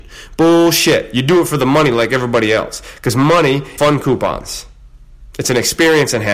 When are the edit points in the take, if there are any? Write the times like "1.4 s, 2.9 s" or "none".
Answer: 3.8 s

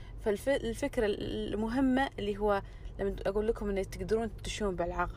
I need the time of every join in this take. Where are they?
none

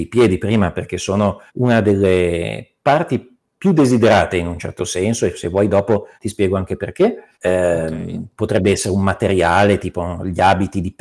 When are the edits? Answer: 1.5 s, 6.1 s, 7.3 s

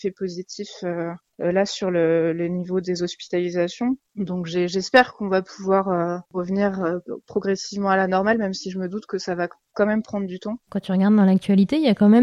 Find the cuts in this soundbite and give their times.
none

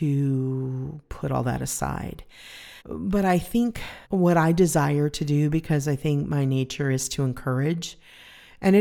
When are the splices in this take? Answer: 2.8 s, 4.0 s

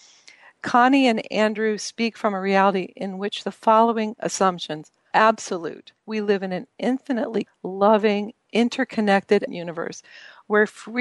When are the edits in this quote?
5.1 s, 6.0 s, 7.5 s, 9.5 s

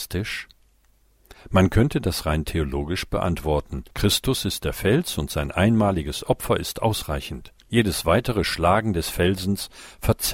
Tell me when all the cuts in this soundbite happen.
3.9 s, 7.6 s

